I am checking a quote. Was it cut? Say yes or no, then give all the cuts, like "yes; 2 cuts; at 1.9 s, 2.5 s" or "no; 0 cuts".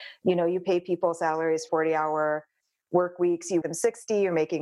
yes; 2 cuts; at 1.7 s, 3.6 s